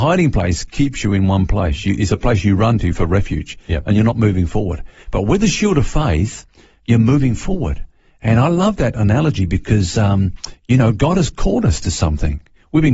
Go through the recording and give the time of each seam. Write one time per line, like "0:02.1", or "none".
none

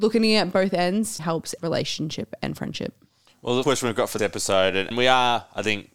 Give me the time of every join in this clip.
0:01.2
0:01.6
0:03.6
0:04.2
0:04.9

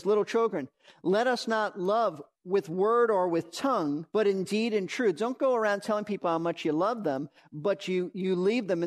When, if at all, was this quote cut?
0:02.3
0:04.1

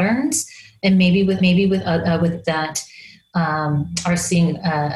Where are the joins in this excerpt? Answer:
0:01.4
0:02.4

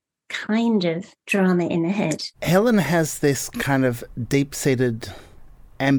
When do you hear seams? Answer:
0:01.2
0:02.3

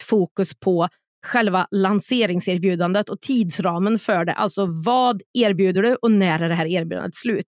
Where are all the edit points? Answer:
none

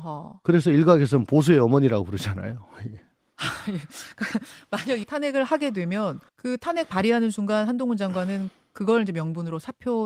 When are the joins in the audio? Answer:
0:05.0
0:06.3

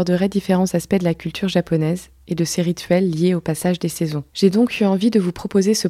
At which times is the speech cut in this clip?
0:04.3

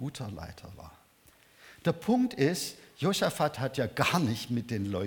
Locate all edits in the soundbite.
none

